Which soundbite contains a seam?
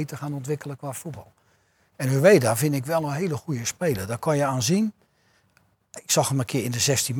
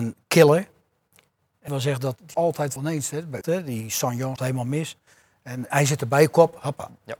second; 6 cuts; at 1.7 s, 2.3 s, 2.8 s, 3.4 s, 4.4 s, 5.7 s

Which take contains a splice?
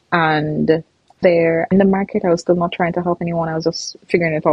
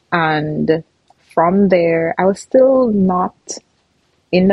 first; 2 cuts; at 1.2 s, 1.7 s

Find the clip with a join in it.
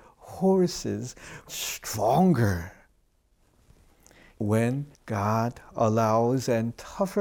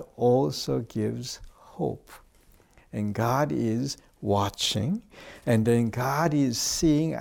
first; 3 cuts; at 1.5 s, 4.4 s, 4.9 s

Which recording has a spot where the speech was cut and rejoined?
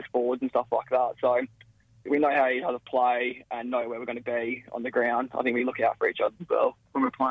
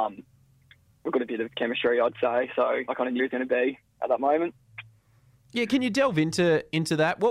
second; 3 cuts; at 2.9 s, 3.2 s, 5.7 s

